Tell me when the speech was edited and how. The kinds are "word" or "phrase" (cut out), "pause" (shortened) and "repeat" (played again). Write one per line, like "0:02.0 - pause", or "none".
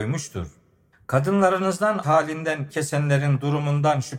0:02.0 - word
0:02.7 - word